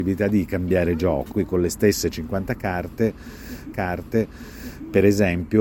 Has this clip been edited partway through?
yes; 2 cuts; at 1.3 s, 3.7 s

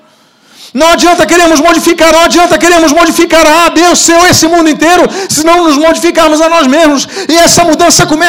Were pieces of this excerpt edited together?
yes; 1 cut; at 2.1 s

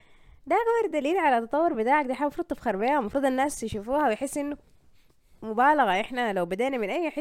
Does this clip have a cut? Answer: no; 0 cuts

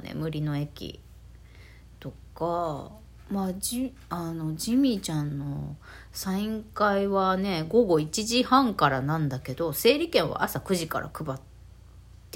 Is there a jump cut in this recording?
no; 0 cuts

